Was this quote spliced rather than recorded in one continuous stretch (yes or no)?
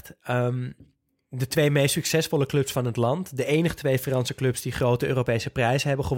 no